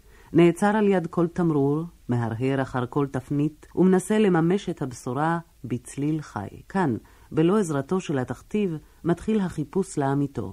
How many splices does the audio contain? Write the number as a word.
three